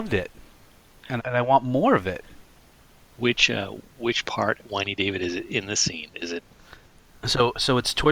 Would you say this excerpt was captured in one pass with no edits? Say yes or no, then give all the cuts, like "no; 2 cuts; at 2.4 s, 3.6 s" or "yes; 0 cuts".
no; 2 cuts; at 1.2 s, 4.6 s